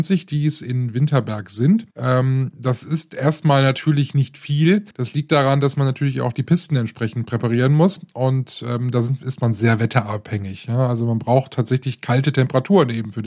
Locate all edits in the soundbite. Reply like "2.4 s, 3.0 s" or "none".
1.9 s, 4.9 s